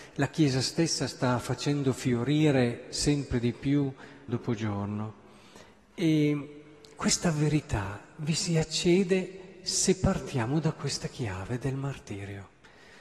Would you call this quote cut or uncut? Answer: cut